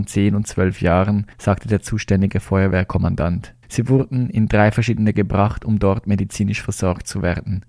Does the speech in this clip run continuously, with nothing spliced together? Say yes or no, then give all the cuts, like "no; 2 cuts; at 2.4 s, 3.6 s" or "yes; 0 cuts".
no; 3 cuts; at 1.3 s, 3.6 s, 5.1 s